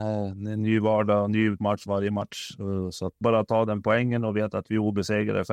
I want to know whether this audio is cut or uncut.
cut